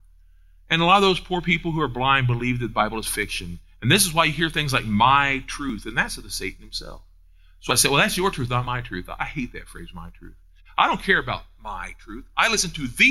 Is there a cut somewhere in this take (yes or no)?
no